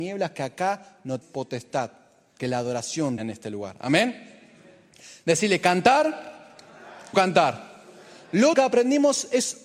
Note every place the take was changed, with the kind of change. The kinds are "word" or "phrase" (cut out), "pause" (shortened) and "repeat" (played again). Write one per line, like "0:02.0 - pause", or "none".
0:01.2 - word
0:02.4 - word
0:03.2 - word
0:07.1 - word
0:08.5 - word